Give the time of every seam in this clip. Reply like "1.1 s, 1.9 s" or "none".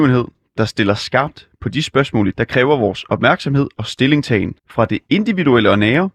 2.3 s, 4.6 s